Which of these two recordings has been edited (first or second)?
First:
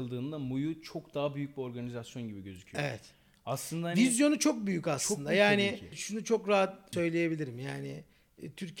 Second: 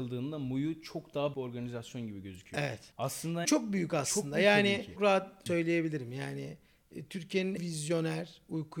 second